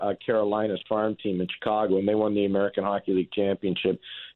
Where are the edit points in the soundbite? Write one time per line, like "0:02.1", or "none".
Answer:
none